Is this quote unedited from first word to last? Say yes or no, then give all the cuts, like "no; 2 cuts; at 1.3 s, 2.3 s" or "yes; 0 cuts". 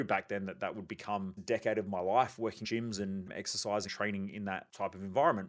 no; 3 cuts; at 1.4 s, 2.6 s, 3.9 s